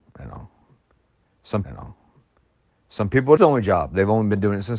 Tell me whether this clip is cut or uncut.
cut